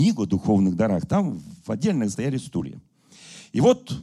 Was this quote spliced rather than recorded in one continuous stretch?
yes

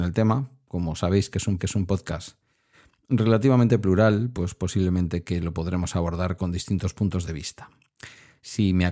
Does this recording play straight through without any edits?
no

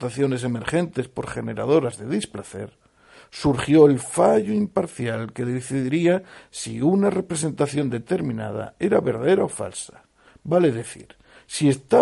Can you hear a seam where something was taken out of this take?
no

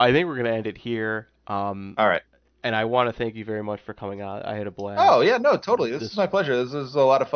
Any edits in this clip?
no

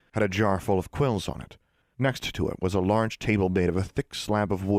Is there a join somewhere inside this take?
no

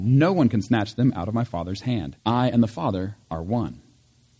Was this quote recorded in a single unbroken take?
no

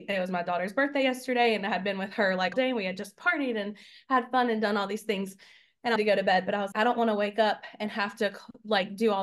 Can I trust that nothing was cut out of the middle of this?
no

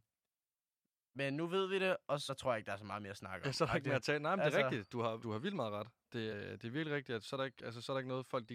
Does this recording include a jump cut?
yes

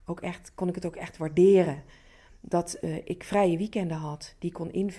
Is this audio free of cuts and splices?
yes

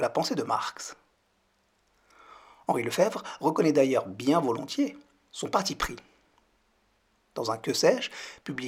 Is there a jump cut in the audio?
no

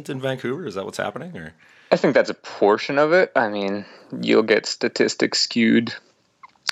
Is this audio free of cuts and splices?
yes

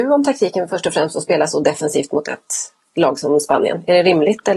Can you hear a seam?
no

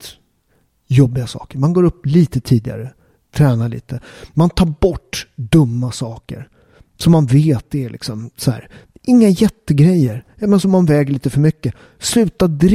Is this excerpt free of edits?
yes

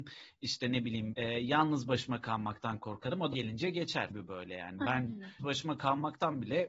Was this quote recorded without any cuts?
no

